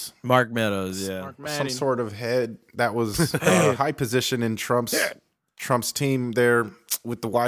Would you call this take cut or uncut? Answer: uncut